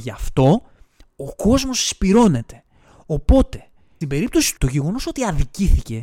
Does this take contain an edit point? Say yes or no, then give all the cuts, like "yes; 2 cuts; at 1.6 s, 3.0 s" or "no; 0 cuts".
yes; 2 cuts; at 4.0 s, 4.6 s